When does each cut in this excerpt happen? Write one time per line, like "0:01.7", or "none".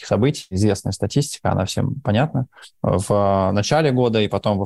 none